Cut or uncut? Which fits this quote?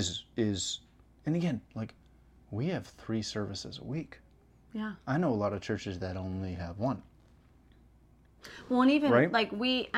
uncut